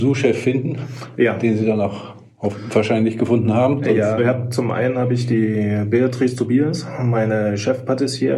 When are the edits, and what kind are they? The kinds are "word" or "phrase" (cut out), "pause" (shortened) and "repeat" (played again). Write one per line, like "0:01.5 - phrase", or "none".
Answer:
0:04.2 - word